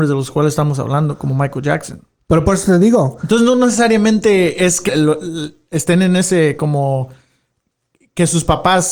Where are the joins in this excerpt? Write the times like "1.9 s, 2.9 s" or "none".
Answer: 4.9 s